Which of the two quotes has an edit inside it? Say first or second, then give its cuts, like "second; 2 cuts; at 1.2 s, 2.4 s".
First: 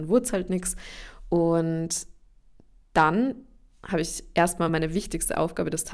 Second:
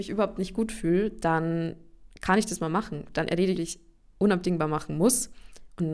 second; 1 cut; at 3.6 s